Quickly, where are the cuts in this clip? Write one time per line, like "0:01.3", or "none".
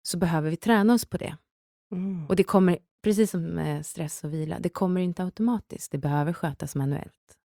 none